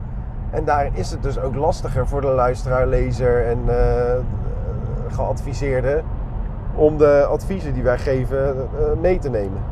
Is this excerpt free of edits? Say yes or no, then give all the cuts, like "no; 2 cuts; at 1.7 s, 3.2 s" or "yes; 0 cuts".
yes; 0 cuts